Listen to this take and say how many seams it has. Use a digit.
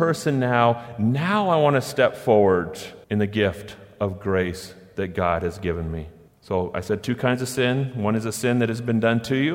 2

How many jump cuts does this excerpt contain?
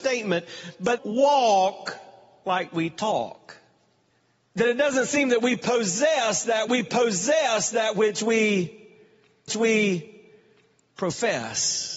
4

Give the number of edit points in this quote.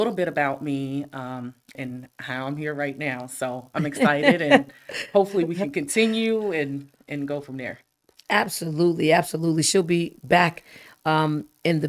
0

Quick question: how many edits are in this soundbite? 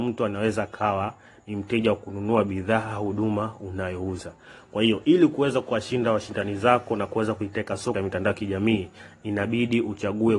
1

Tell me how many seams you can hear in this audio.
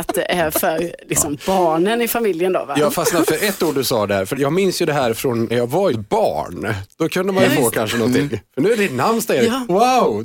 4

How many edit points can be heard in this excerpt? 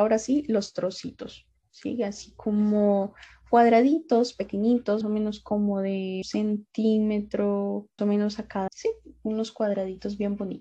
4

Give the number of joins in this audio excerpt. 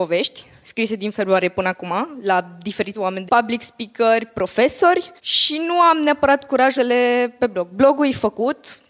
5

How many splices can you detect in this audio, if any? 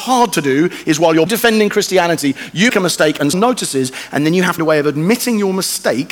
4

